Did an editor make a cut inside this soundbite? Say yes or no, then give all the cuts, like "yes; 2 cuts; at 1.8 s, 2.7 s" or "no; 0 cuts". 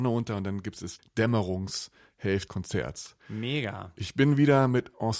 yes; 2 cuts; at 1.0 s, 2.5 s